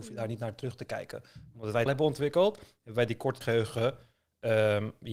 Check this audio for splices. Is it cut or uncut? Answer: cut